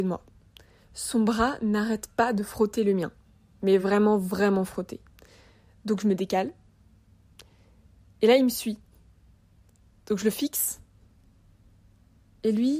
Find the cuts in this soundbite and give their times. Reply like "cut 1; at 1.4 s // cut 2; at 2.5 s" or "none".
none